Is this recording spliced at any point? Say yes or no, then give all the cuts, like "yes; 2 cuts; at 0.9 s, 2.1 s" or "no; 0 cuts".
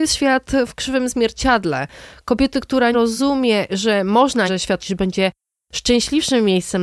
yes; 3 cuts; at 2.9 s, 4.5 s, 4.8 s